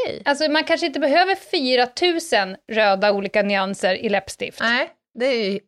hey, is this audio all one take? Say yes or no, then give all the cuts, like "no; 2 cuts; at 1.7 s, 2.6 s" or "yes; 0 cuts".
yes; 0 cuts